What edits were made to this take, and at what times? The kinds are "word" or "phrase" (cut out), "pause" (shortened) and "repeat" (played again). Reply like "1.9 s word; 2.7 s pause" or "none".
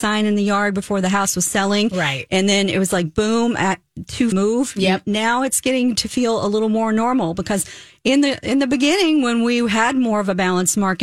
4.3 s phrase